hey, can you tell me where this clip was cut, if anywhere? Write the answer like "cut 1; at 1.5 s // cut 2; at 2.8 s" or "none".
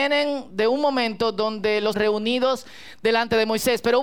cut 1; at 1.9 s